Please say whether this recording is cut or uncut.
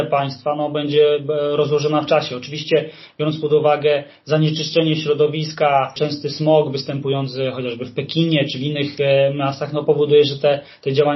uncut